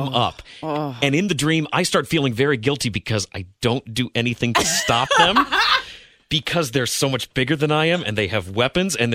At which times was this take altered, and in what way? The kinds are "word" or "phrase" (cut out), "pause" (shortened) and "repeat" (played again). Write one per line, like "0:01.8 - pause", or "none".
none